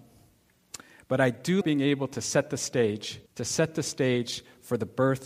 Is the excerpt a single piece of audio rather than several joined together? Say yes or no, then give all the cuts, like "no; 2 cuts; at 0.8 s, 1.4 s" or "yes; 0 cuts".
no; 2 cuts; at 1.6 s, 3.3 s